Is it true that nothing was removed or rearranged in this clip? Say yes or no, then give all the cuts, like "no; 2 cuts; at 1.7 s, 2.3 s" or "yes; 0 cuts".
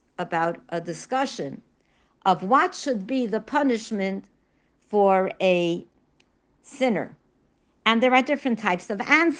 yes; 0 cuts